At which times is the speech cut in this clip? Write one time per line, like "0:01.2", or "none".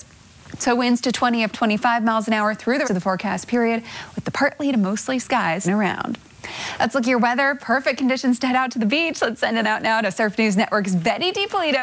0:01.5
0:02.8
0:05.2
0:05.6
0:09.6